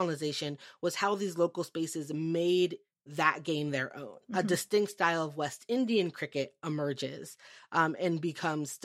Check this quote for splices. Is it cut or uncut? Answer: uncut